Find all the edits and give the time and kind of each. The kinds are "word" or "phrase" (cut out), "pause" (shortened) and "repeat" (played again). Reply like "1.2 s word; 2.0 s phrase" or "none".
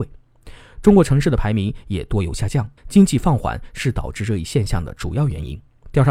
2.8 s pause